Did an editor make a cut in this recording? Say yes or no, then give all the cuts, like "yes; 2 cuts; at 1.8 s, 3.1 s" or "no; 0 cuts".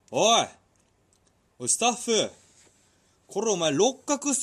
no; 0 cuts